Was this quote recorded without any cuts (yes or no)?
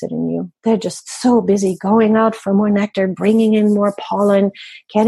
yes